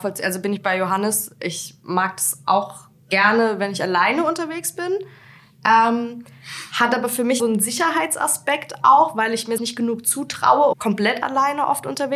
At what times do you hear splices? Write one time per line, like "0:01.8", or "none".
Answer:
0:07.4
0:09.6
0:10.7